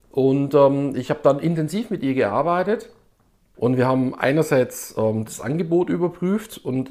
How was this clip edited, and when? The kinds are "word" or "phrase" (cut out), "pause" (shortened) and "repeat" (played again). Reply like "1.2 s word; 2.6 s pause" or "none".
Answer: none